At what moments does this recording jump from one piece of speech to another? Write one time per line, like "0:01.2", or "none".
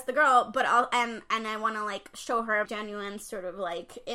0:02.6

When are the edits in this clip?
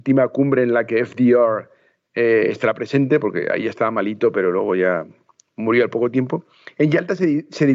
none

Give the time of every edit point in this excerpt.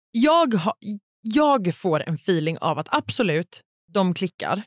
none

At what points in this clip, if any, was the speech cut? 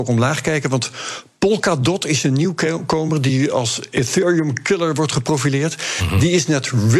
none

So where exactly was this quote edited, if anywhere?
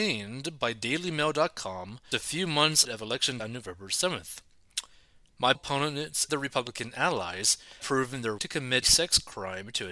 0:02.1
0:02.8
0:03.4
0:05.5
0:06.3
0:07.8
0:08.4
0:08.8

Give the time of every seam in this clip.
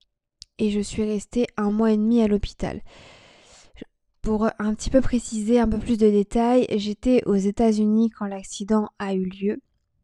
none

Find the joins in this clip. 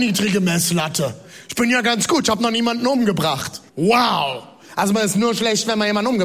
0:03.7

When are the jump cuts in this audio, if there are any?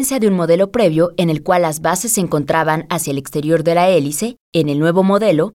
0:04.4

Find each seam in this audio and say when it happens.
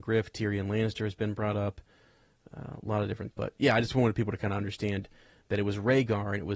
0:03.3

